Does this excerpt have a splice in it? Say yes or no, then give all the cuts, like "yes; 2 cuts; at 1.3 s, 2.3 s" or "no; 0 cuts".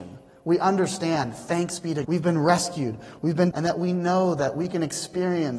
yes; 2 cuts; at 2.0 s, 3.5 s